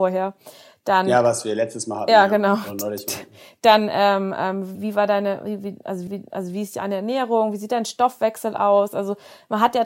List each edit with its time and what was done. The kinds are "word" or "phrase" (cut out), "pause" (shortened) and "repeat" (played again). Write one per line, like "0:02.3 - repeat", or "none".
0:04.7 - word
0:06.1 - repeat

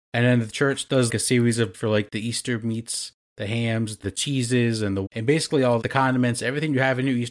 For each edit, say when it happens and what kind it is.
0:01.1 - word
0:01.7 - word
0:04.0 - word
0:05.1 - word
0:05.8 - word

